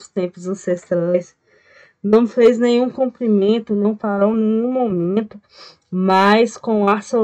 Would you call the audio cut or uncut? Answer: uncut